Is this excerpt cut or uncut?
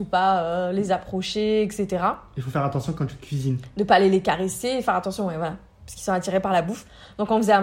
uncut